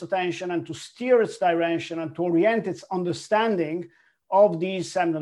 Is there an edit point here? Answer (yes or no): no